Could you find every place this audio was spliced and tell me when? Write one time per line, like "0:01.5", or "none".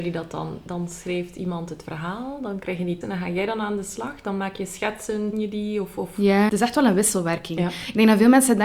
0:03.0
0:05.3
0:06.5